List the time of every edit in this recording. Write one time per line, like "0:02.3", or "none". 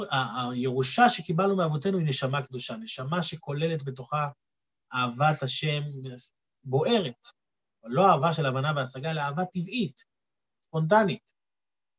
none